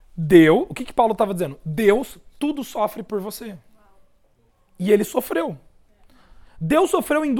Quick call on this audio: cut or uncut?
uncut